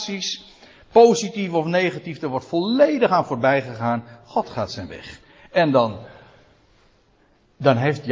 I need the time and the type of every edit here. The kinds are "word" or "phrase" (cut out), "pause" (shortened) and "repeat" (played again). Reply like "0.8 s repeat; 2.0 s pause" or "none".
none